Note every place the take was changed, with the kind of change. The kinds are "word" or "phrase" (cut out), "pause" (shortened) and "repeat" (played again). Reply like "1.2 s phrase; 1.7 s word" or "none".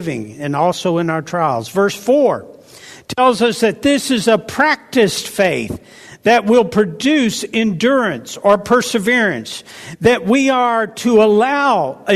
none